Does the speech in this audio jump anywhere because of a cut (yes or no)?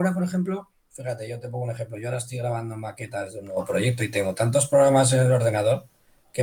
no